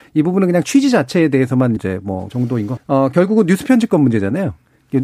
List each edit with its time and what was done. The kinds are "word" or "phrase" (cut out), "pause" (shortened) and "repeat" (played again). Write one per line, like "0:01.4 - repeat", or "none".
0:01.8 - word
0:02.3 - word
0:02.8 - word